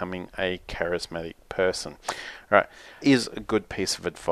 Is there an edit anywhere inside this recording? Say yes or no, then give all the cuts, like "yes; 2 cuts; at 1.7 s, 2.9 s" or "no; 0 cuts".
yes; 1 cut; at 3.0 s